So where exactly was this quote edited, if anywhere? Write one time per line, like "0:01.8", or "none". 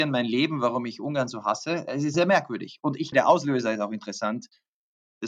0:02.1
0:03.1